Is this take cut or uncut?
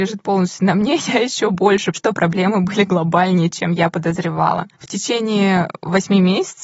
cut